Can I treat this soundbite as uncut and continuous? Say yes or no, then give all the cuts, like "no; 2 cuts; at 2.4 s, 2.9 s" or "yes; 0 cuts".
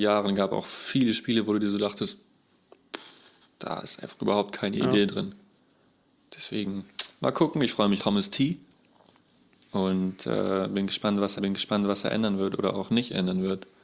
no; 2 cuts; at 8.0 s, 11.4 s